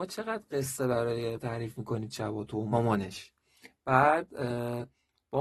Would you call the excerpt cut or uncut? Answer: cut